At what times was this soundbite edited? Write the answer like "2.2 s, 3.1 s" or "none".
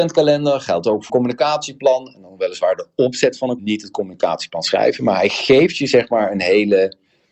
1.1 s, 3.6 s